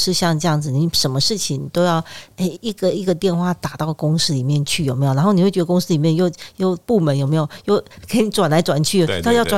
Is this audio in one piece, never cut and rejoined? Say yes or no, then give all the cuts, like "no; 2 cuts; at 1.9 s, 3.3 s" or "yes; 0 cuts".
yes; 0 cuts